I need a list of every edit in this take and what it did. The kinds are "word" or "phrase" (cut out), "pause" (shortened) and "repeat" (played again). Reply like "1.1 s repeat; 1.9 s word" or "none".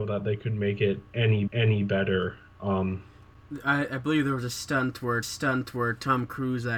1.5 s repeat; 5.2 s repeat